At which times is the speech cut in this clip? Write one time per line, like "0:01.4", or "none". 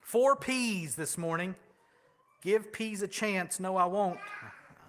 none